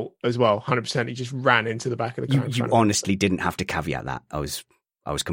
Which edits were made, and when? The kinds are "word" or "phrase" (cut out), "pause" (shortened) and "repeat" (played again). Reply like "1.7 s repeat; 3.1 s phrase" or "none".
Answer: none